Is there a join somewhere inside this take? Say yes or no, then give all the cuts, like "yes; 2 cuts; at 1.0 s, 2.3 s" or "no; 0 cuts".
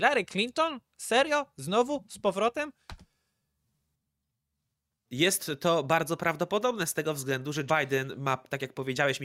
yes; 1 cut; at 7.7 s